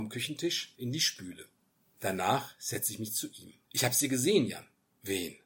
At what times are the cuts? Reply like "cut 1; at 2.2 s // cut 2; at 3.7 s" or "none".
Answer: cut 1; at 3.6 s